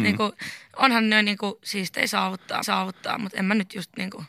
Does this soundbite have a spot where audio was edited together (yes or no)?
yes